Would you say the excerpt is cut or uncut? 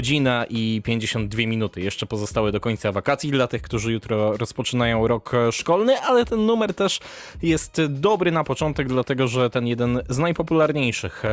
uncut